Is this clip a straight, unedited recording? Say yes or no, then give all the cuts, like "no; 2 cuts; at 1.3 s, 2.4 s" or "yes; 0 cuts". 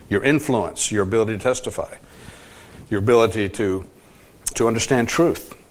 no; 1 cut; at 4.5 s